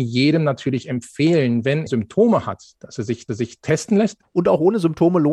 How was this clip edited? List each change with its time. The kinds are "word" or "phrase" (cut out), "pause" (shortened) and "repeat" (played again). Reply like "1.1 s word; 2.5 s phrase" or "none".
1.9 s word; 3.3 s repeat